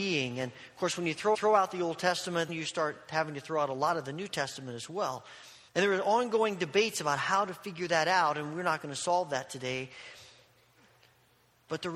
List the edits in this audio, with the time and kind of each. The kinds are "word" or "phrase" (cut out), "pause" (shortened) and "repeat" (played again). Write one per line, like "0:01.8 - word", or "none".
0:01.3 - repeat
0:02.5 - word
0:05.7 - pause